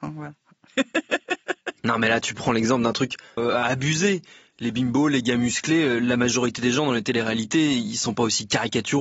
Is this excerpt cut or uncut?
cut